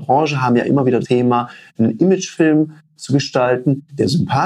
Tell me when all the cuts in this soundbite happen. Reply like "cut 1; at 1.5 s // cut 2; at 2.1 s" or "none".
cut 1; at 1.0 s